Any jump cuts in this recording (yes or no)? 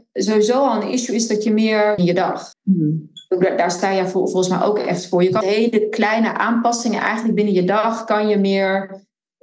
yes